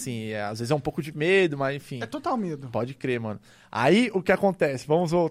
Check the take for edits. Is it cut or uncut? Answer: uncut